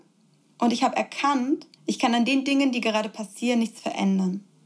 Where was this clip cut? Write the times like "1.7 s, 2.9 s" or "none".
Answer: 1.7 s